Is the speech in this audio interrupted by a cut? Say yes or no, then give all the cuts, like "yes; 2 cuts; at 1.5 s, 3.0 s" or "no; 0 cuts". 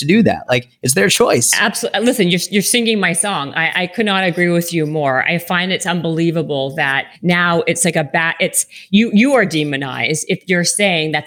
yes; 1 cut; at 7.1 s